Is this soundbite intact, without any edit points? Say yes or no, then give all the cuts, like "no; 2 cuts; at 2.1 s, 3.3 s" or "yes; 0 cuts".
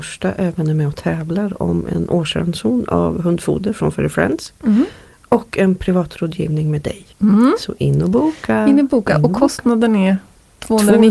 yes; 0 cuts